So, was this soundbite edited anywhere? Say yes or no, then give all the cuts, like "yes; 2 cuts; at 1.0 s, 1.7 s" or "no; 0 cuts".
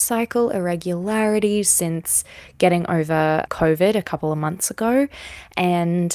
yes; 1 cut; at 3.5 s